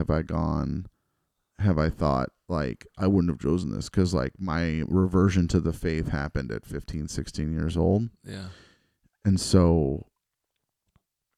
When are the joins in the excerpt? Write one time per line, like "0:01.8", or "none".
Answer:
none